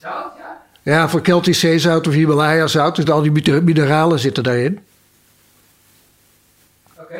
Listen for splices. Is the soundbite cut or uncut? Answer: uncut